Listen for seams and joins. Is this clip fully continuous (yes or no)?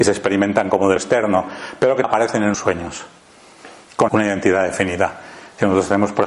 no